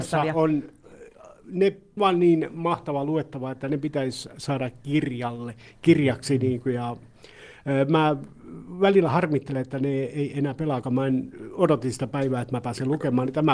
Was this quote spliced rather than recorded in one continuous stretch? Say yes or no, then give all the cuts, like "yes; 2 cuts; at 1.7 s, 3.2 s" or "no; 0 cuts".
yes; 2 cuts; at 2.0 s, 10.8 s